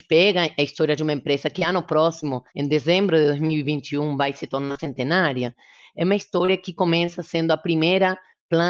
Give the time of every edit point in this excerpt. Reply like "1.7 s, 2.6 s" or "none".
2.5 s